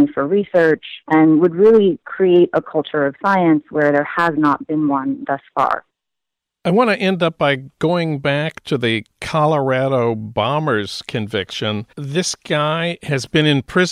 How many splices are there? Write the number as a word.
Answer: two